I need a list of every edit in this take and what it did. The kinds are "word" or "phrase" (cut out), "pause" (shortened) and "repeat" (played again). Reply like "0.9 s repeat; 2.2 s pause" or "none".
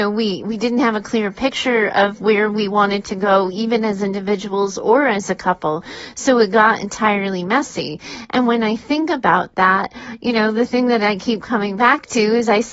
none